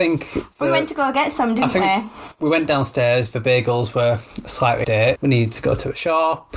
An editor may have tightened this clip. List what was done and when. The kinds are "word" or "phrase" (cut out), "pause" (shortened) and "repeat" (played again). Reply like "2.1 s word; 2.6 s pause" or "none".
4.8 s phrase; 5.2 s word